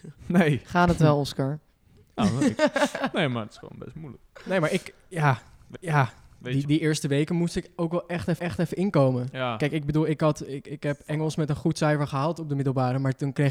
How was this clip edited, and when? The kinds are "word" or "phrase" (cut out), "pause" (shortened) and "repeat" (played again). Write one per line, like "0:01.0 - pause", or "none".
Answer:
0:05.8 - repeat
0:06.6 - word
0:08.4 - repeat